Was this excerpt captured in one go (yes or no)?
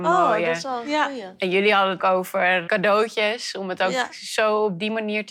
no